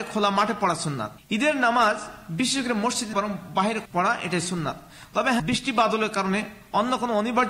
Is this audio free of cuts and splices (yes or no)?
no